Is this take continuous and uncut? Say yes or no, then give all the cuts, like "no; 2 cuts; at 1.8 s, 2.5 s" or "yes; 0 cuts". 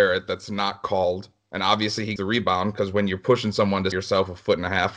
no; 2 cuts; at 2.2 s, 3.9 s